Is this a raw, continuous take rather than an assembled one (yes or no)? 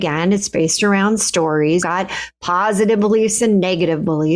no